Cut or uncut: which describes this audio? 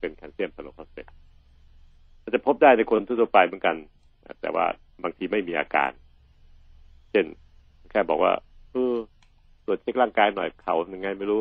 uncut